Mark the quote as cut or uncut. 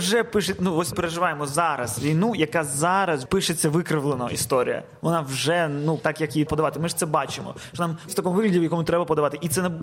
cut